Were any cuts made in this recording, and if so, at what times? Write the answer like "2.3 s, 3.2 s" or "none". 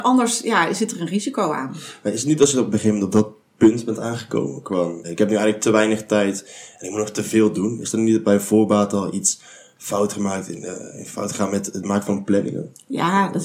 5.0 s